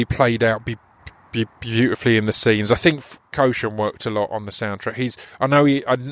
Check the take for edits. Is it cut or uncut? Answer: cut